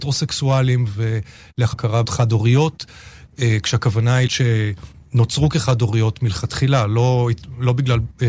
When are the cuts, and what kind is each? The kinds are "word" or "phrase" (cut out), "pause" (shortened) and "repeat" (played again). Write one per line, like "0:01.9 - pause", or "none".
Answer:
0:01.7 - phrase
0:02.0 - word
0:04.3 - word